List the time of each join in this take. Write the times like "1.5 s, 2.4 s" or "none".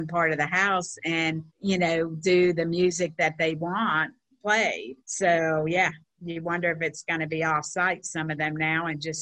1.5 s, 5.0 s, 6.0 s